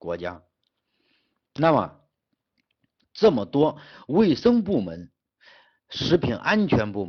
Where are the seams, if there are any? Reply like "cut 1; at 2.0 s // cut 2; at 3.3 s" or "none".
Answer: none